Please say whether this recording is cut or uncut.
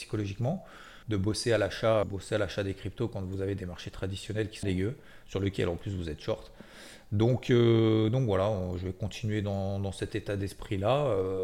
cut